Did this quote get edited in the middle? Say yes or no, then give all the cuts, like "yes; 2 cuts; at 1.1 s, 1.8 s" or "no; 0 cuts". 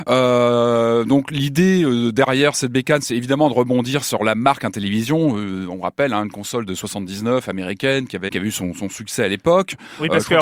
yes; 1 cut; at 8.3 s